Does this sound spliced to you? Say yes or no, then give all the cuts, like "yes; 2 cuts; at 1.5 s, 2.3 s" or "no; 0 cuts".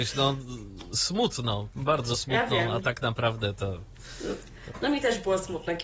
no; 0 cuts